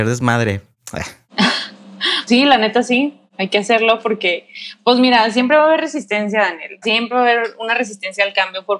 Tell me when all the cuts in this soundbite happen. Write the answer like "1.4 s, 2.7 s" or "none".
2.3 s, 6.8 s